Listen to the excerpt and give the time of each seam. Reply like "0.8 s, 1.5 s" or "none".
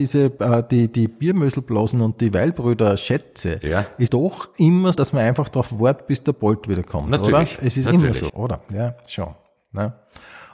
4.1 s, 4.9 s, 8.3 s